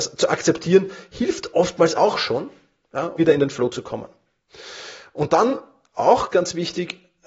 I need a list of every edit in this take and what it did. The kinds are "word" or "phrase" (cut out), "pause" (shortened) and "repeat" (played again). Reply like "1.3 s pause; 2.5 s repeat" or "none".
1.9 s word; 3.2 s word; 6.3 s word